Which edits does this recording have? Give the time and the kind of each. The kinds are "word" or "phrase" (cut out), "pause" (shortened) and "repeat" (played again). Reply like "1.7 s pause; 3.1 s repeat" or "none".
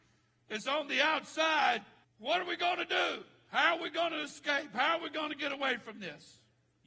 2.0 s pause